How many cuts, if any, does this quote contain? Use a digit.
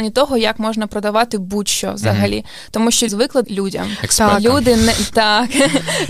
2